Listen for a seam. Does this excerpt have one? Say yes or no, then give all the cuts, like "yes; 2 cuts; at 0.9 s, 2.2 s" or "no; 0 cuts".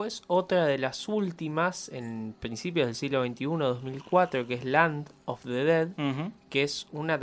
no; 0 cuts